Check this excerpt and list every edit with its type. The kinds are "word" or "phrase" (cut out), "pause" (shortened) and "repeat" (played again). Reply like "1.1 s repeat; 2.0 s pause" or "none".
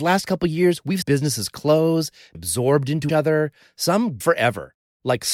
1.0 s word; 2.3 s word; 3.1 s word; 4.2 s word